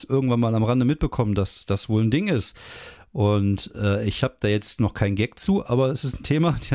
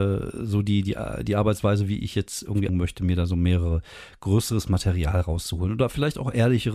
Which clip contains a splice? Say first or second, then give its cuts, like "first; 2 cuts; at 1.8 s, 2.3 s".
second; 1 cut; at 2.7 s